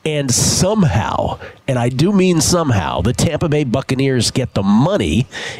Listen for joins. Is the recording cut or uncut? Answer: uncut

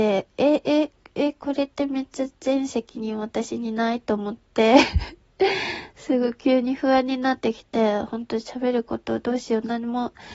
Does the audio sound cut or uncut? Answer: uncut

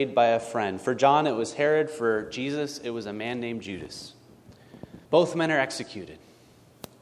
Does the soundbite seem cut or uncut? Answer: cut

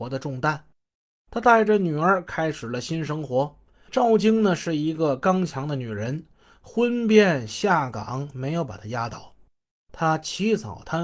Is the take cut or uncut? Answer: uncut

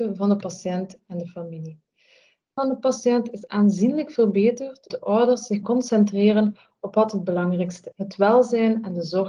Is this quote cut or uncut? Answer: cut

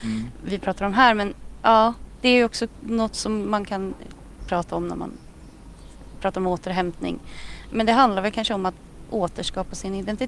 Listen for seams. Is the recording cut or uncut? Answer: cut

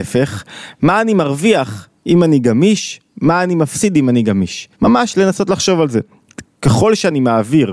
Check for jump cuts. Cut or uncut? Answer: cut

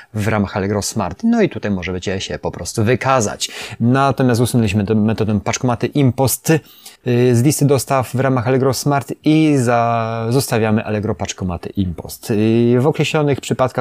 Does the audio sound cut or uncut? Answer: cut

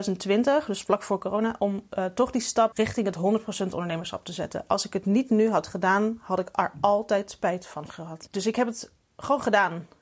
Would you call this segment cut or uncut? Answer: uncut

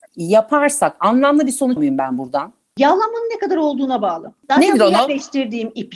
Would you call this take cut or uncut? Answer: cut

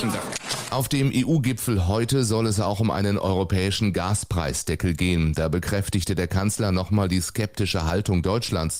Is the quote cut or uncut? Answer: uncut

